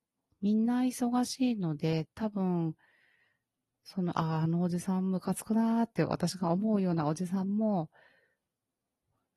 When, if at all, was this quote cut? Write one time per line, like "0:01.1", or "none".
0:02.1